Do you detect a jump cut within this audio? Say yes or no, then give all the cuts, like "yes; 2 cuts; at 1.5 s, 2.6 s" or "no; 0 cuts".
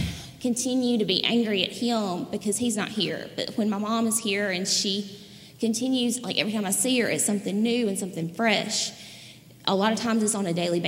no; 0 cuts